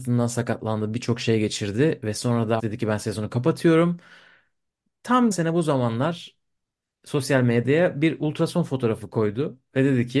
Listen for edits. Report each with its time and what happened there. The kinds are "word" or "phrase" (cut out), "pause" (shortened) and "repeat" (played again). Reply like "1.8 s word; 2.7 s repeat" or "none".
2.6 s word; 5.3 s word